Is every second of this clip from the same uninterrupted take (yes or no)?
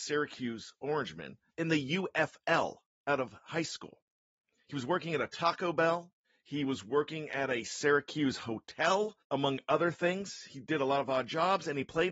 no